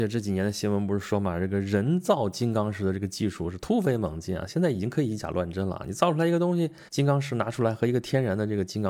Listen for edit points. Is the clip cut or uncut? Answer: cut